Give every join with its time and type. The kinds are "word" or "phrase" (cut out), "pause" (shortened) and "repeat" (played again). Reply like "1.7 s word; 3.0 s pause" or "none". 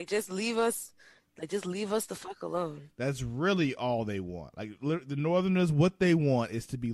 none